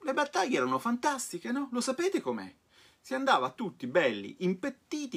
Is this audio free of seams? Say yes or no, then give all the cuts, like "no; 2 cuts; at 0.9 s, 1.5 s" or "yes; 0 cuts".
yes; 0 cuts